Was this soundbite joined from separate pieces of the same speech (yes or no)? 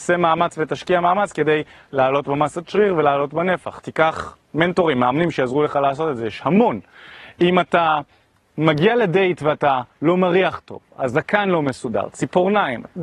no